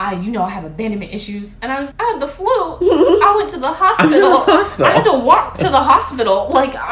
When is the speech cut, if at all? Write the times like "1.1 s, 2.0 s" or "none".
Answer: 1.9 s